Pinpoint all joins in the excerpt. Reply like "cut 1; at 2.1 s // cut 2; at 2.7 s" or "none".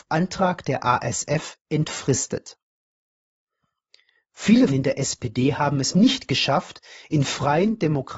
cut 1; at 4.7 s // cut 2; at 5.9 s